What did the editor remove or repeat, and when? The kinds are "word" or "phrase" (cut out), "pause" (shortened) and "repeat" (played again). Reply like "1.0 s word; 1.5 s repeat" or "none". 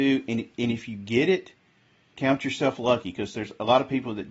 none